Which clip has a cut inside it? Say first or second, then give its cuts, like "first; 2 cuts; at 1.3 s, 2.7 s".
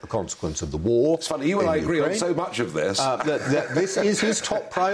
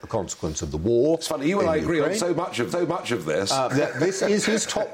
second; 2 cuts; at 2.7 s, 3.7 s